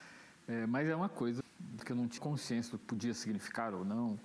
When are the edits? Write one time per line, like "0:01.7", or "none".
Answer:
0:01.4
0:01.8
0:02.2
0:02.8